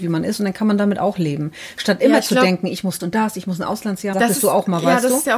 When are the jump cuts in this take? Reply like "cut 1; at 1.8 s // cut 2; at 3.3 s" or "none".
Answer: cut 1; at 3.0 s // cut 2; at 4.1 s